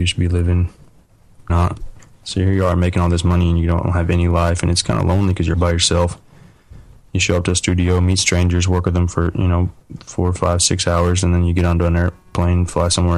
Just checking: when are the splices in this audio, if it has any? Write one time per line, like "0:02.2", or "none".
0:01.5
0:05.5
0:07.0